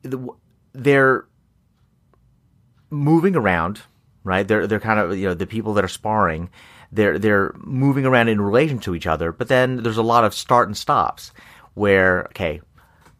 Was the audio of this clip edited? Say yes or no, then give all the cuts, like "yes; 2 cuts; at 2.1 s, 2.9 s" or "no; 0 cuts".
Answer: no; 0 cuts